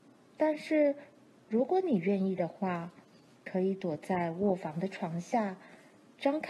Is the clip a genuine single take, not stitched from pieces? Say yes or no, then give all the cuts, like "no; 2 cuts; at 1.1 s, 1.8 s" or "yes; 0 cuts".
yes; 0 cuts